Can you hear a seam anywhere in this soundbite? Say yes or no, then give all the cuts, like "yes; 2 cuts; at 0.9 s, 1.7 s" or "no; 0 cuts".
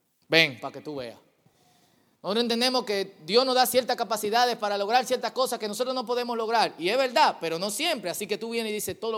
no; 0 cuts